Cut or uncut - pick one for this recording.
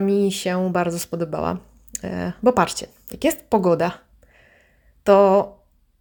uncut